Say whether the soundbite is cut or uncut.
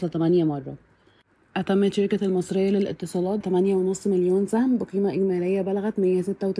cut